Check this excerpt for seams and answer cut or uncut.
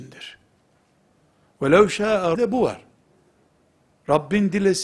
cut